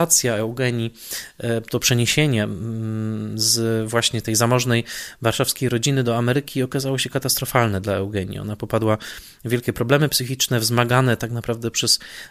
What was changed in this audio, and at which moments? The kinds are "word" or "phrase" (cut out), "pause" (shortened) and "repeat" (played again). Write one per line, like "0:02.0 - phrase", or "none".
none